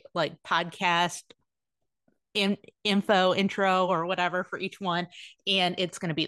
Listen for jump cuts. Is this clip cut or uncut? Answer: uncut